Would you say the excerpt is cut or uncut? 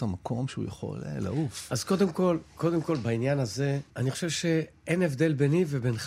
cut